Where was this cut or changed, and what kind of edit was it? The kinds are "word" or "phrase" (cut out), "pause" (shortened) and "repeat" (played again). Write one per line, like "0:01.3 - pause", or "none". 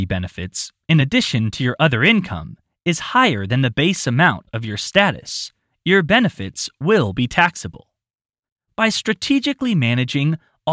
none